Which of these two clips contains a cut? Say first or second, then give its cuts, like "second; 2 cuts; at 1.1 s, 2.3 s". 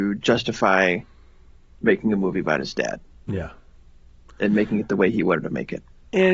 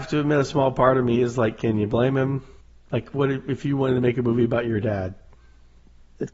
second; 1 cut; at 2.6 s